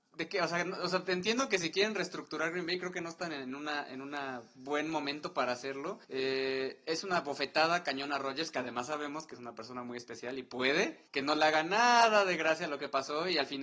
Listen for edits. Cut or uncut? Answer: cut